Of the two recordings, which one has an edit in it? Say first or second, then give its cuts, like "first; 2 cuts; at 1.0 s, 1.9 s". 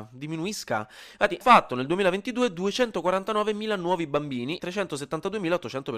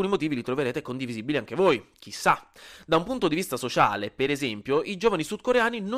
first; 2 cuts; at 1.4 s, 4.6 s